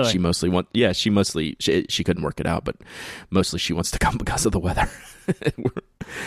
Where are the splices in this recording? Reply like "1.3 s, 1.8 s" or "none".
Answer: none